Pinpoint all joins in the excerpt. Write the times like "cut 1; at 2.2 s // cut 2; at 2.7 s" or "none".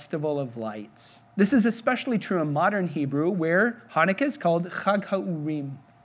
cut 1; at 1.3 s